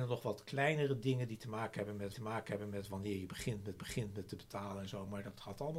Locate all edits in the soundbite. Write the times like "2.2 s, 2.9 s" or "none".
2.1 s, 3.8 s